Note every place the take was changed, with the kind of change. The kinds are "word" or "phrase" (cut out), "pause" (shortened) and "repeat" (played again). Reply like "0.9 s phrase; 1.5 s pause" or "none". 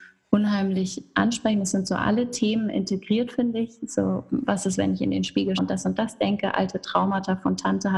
5.6 s word